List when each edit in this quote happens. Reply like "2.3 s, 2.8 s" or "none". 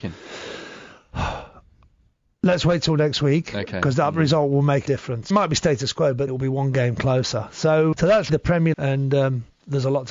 4.9 s, 5.3 s, 6.3 s, 7.9 s, 8.3 s, 8.7 s